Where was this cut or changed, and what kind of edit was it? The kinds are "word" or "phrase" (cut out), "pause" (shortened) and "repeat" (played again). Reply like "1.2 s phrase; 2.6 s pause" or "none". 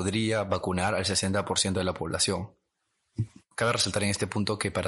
none